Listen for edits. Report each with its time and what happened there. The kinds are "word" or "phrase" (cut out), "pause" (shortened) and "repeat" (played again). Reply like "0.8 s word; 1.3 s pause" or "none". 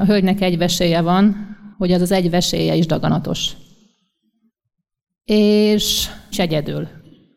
1.7 s pause; 6.3 s word